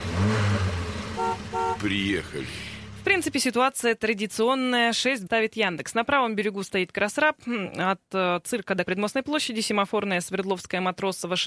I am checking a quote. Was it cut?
yes; 2 cuts; at 5.3 s, 8.8 s

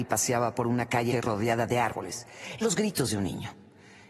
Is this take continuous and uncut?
no; 2 cuts; at 1.1 s, 2.6 s

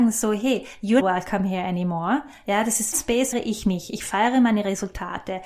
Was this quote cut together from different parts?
yes; 3 cuts; at 1.0 s, 2.9 s, 3.3 s

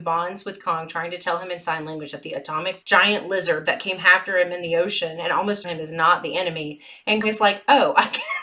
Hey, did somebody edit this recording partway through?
yes; 3 cuts; at 2.8 s, 5.6 s, 7.2 s

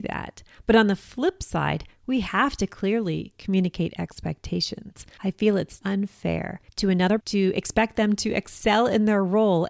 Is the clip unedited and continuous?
no; 2 cuts; at 5.8 s, 7.2 s

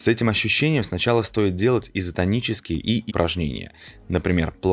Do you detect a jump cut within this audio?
yes; 1 cut; at 3.1 s

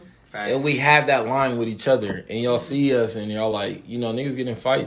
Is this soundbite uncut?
yes; 0 cuts

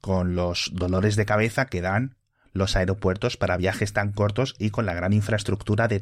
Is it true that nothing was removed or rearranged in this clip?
yes; 0 cuts

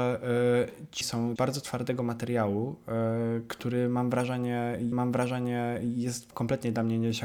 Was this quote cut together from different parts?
yes; 3 cuts; at 1.0 s, 1.4 s, 4.9 s

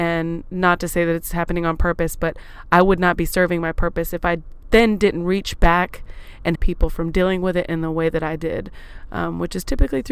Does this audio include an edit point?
yes; 1 cut; at 6.5 s

